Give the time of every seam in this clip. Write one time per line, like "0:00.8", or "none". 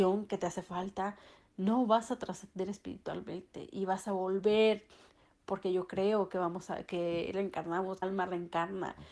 0:08.0